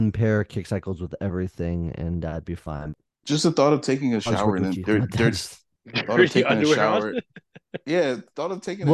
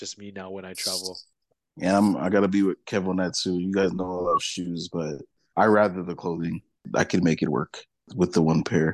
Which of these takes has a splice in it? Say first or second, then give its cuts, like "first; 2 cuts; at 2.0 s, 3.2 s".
first; 1 cut; at 4.9 s